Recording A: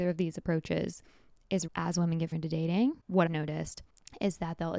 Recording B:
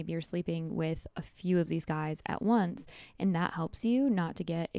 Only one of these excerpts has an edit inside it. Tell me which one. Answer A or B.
A